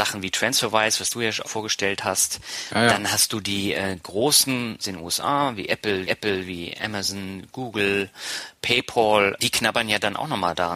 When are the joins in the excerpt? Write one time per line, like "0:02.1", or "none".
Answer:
0:01.5
0:04.8
0:06.1
0:09.4